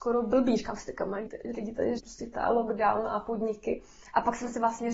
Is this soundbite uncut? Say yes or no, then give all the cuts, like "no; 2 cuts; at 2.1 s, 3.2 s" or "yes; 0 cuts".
no; 3 cuts; at 1.3 s, 2.0 s, 2.3 s